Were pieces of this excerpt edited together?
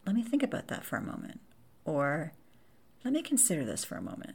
no; 0 cuts

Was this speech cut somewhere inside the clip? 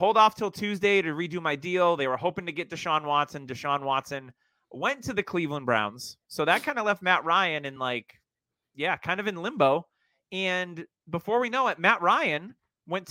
no; 0 cuts

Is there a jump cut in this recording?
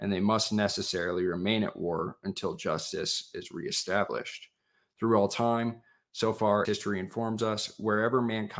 yes; 1 cut; at 6.6 s

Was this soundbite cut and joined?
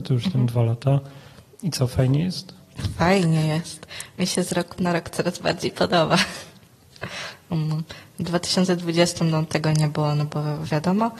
no; 0 cuts

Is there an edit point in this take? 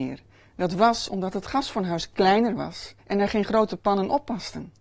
yes; 1 cut; at 3.0 s

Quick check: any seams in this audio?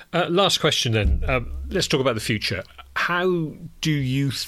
no; 0 cuts

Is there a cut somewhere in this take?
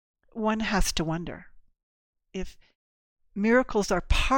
no; 0 cuts

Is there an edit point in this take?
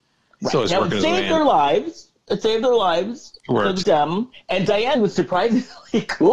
yes; 3 cuts; at 3.8 s, 4.3 s, 4.9 s

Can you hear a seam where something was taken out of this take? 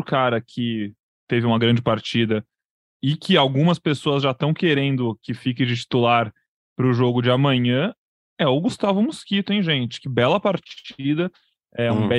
no; 0 cuts

